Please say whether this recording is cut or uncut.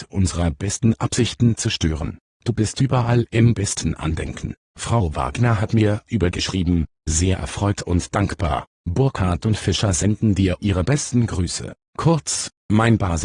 cut